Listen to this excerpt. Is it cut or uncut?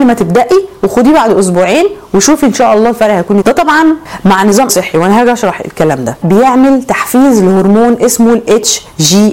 cut